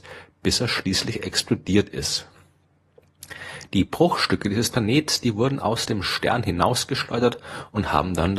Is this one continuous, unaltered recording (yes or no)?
yes